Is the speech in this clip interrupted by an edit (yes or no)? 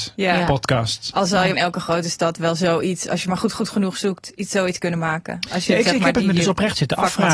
yes